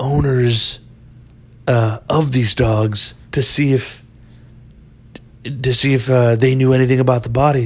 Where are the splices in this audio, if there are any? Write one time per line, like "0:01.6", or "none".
0:03.2